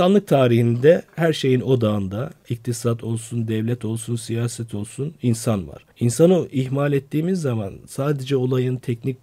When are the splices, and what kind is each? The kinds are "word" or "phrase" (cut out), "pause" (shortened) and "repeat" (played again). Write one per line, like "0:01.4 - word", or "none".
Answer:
0:05.9 - pause

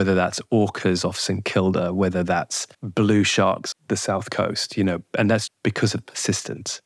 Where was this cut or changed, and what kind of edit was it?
0:02.7 - pause
0:03.7 - word
0:05.5 - word

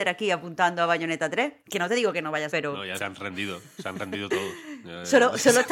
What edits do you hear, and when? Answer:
0:01.6 - pause
0:02.5 - word
0:03.0 - word

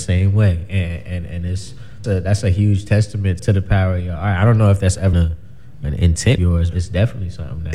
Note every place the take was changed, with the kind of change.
0:02.0 - word
0:03.4 - word
0:05.1 - word
0:05.8 - word
0:06.4 - word
0:06.7 - word

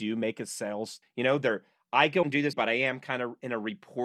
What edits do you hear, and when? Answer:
0:01.0 - word
0:02.2 - word
0:02.5 - word

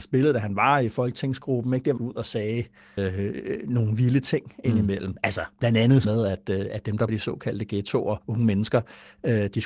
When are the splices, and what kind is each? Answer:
0:02.0 - phrase
0:03.0 - word
0:06.0 - word
0:07.1 - word
0:08.2 - pause

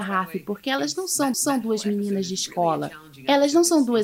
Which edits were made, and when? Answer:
0:01.3 - repeat

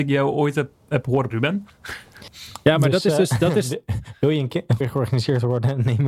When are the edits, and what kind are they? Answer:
0:01.3 - word
0:04.8 - word

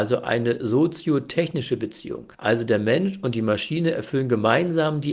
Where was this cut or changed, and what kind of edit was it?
0:02.3 - pause

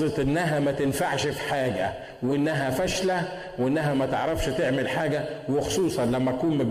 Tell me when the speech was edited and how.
none

